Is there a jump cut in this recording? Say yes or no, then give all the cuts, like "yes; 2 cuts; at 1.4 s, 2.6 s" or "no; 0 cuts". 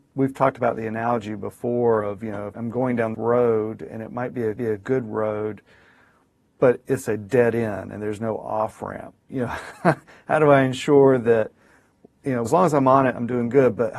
yes; 4 cuts; at 2.5 s, 3.1 s, 4.6 s, 12.4 s